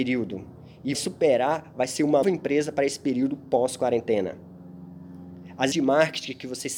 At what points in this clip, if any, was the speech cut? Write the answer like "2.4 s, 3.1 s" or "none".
0.9 s, 2.2 s, 5.7 s